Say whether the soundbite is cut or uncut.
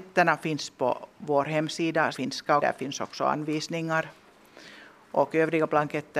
cut